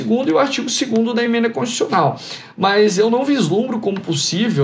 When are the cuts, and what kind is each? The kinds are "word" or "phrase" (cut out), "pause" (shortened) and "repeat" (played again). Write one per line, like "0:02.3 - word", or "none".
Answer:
none